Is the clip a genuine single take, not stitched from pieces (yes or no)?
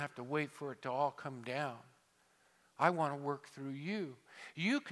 yes